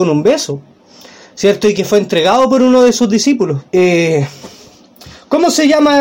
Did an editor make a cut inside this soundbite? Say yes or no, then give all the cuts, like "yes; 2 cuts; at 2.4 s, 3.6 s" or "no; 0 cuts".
yes; 1 cut; at 3.7 s